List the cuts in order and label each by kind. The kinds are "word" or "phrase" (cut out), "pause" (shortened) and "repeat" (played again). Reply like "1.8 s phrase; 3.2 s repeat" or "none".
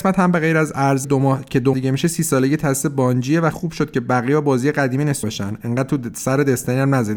1.0 s word; 1.7 s word; 3.5 s word; 5.2 s word